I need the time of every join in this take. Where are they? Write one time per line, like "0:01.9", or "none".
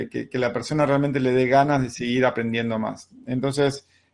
none